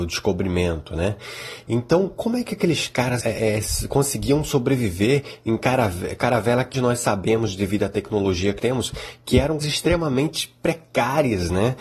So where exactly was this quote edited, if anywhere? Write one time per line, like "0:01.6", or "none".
0:03.2
0:06.7
0:08.6
0:09.6